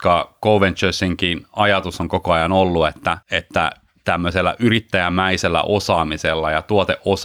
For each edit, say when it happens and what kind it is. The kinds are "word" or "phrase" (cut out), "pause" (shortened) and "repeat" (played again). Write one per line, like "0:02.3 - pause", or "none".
0:03.2 - pause